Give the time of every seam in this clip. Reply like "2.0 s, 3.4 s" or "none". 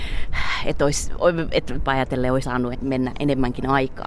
1.8 s, 2.4 s, 2.7 s

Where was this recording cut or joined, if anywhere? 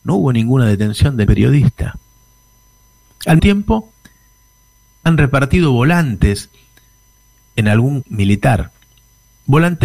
1.3 s, 3.4 s, 8.0 s

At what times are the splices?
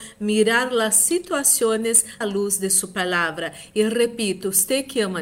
2.2 s

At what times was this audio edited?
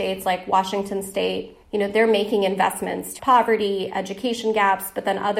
1.6 s, 3.2 s

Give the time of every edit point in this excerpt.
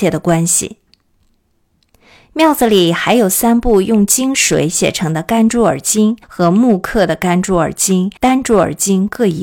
6.2 s, 8.2 s

